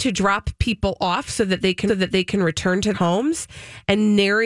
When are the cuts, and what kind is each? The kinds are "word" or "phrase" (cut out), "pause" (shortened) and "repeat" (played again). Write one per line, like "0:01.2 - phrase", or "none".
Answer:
0:01.9 - repeat
0:02.9 - word